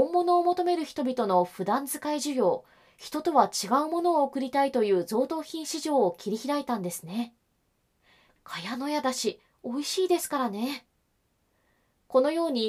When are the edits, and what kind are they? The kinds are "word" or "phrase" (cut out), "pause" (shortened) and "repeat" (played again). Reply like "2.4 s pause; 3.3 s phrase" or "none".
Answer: none